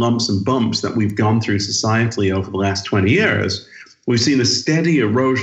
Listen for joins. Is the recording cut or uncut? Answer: uncut